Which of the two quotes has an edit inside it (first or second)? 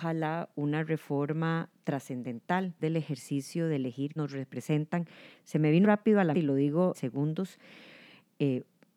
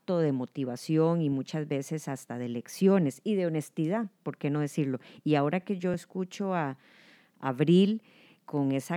first